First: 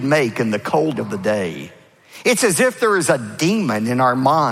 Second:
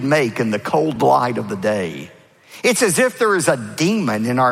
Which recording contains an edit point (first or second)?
first